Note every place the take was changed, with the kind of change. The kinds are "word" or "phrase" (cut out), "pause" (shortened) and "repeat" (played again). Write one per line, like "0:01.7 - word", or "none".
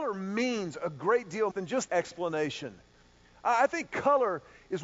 0:01.5 - phrase
0:01.9 - phrase